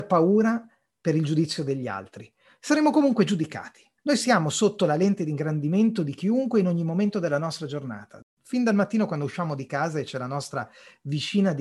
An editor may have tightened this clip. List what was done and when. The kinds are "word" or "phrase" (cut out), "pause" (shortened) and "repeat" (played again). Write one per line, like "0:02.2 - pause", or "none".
0:04.0 - pause